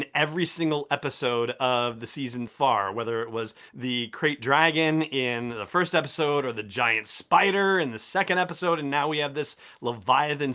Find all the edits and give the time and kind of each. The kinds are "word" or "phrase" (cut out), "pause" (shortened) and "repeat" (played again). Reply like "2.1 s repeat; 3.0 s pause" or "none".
2.5 s word; 3.7 s pause